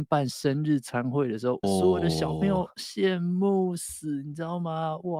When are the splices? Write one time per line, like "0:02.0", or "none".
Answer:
0:01.6